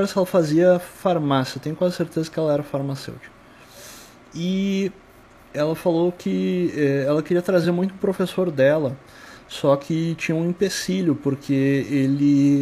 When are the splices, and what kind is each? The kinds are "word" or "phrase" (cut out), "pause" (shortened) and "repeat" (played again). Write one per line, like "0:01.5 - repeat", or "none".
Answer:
none

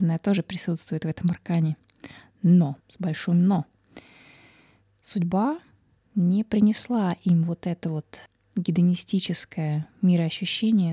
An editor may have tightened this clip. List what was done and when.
0:02.8 - pause
0:08.3 - pause

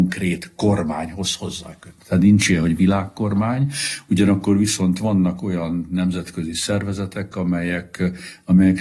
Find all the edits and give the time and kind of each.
none

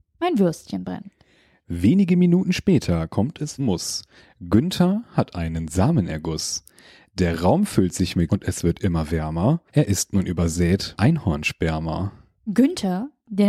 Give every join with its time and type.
0:03.6 - phrase
0:08.3 - word
0:09.7 - pause
0:11.0 - word

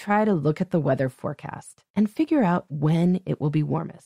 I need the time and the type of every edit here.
0:01.9 - pause

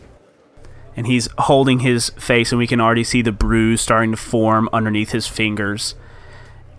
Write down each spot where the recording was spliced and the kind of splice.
none

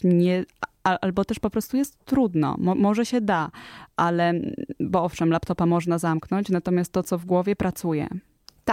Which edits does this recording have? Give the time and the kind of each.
none

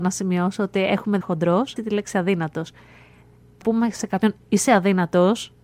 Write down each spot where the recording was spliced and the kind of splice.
0:01.2 - phrase
0:01.8 - phrase
0:03.6 - word

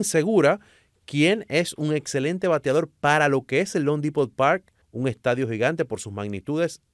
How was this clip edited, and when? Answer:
0:04.8 - pause

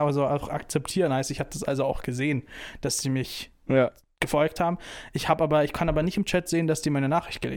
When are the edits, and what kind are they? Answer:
none

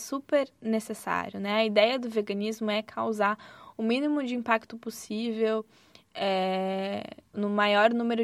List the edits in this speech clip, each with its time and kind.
0:07.3 - word

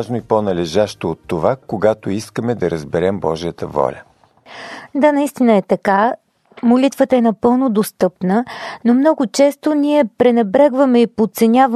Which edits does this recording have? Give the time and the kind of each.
none

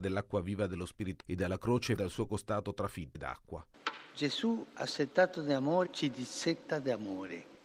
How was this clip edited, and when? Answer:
0:01.2 - word
0:02.0 - word
0:03.1 - word
0:05.9 - word

